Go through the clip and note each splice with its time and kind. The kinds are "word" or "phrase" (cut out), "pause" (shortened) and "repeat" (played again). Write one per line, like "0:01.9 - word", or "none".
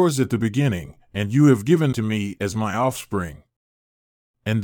0:01.9 - word